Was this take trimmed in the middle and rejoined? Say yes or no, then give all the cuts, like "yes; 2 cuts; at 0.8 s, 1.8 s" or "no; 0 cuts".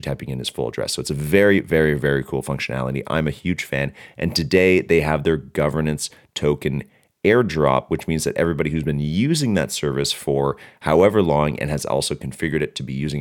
no; 0 cuts